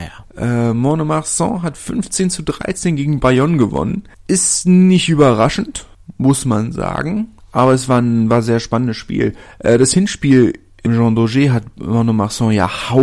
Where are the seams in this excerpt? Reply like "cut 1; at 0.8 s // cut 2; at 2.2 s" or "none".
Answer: cut 1; at 10.9 s